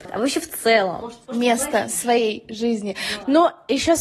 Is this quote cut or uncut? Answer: cut